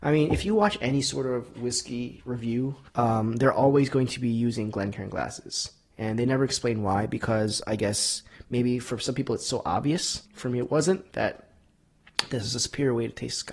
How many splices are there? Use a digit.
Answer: 2